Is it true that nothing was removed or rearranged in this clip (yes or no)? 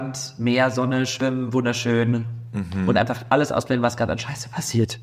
yes